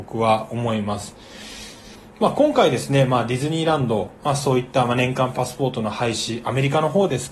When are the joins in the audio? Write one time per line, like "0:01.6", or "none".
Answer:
none

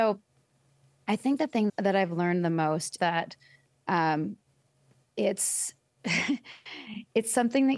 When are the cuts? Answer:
0:01.7
0:03.0

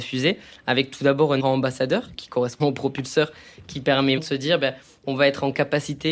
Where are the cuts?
0:01.4
0:02.1
0:02.6
0:04.2

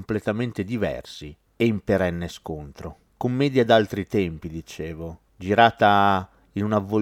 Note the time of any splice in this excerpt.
none

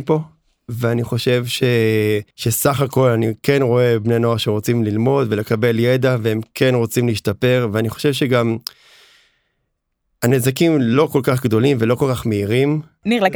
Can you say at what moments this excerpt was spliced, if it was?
0:02.3

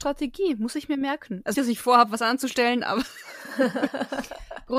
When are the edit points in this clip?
0:01.5

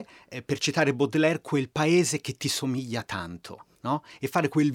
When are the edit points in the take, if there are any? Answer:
0:03.7

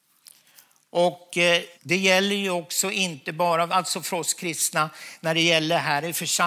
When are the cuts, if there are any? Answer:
0:01.8

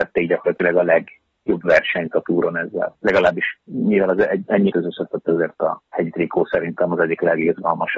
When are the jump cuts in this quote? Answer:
0:04.7

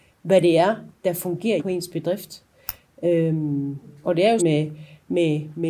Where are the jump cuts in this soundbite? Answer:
0:01.6
0:04.0
0:04.4

